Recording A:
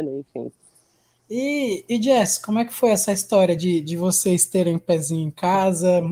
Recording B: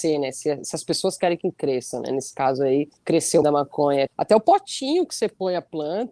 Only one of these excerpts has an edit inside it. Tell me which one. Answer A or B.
B